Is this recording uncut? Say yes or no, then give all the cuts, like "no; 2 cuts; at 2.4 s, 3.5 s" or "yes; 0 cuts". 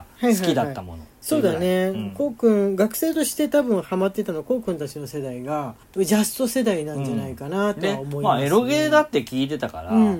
no; 1 cut; at 5.8 s